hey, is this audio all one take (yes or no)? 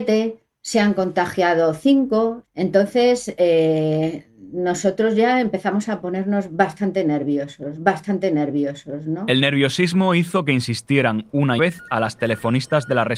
no